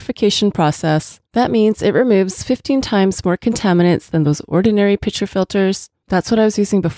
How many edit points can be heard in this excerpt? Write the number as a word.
one